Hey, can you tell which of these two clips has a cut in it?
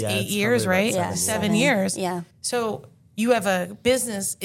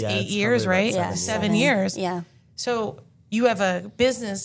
first; 1 cut; at 2.3 s

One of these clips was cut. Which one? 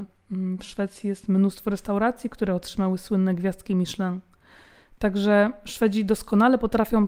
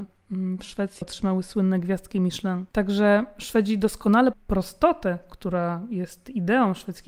second; 3 cuts; at 1.0 s, 2.7 s, 4.3 s

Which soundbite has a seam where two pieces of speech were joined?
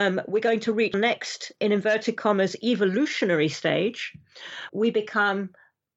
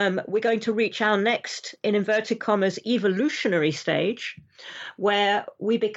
first; 2 cuts; at 0.9 s, 4.7 s

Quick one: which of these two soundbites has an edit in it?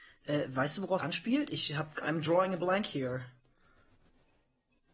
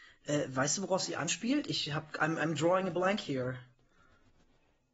first; 2 cuts; at 1.0 s, 2.0 s

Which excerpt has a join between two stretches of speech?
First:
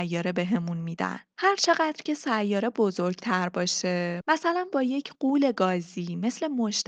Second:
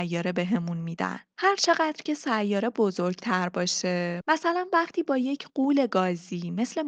first; 1 cut; at 4.7 s

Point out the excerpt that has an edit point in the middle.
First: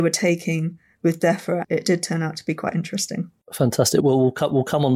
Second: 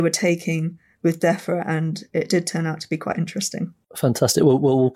first; 2 cuts; at 1.6 s, 4.0 s

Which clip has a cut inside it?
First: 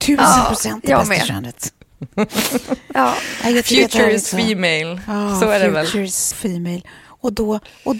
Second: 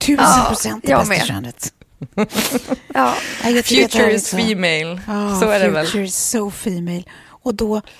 first; 1 cut; at 6.3 s

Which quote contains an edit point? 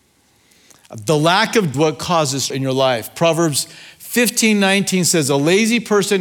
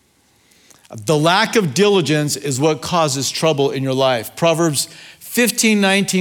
first; 2 cuts; at 1.7 s, 2.5 s

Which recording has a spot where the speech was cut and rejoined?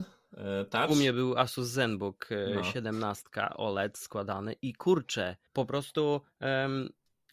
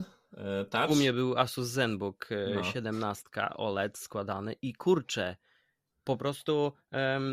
first; 1 cut; at 5.5 s

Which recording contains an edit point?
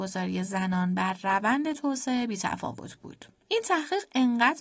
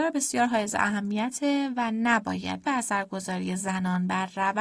second; 1 cut; at 2.6 s

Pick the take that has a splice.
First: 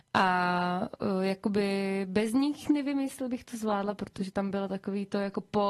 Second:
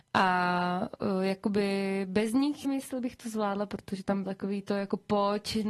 second; 2 cuts; at 2.6 s, 4.2 s

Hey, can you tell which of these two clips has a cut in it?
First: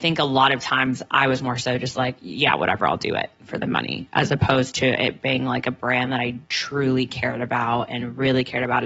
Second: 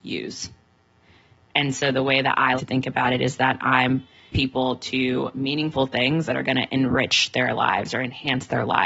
second; 2 cuts; at 2.6 s, 4.3 s

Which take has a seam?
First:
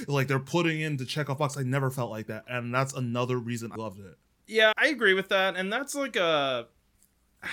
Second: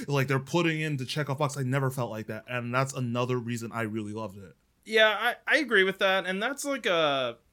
first; 2 cuts; at 3.8 s, 4.7 s

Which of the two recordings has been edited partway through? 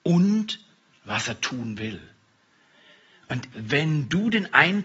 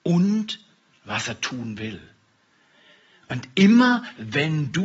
first; 1 cut; at 3.5 s

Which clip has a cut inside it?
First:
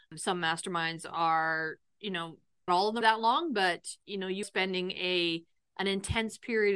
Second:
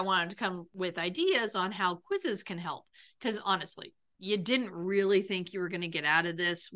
first; 3 cuts; at 2.7 s, 3.0 s, 4.4 s

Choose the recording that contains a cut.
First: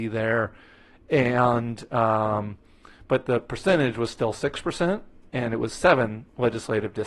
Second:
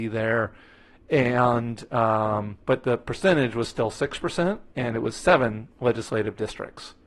second; 2 cuts; at 2.6 s, 4.7 s

